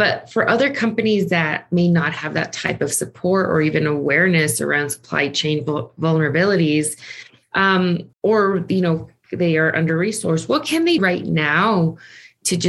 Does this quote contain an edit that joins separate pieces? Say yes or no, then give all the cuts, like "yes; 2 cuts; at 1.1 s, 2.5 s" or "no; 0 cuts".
yes; 2 cuts; at 8.1 s, 11.0 s